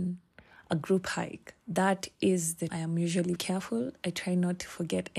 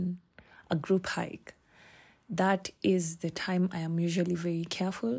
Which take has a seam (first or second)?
first